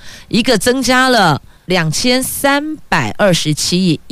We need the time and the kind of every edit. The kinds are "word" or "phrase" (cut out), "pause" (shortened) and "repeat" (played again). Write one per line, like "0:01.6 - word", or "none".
0:01.6 - pause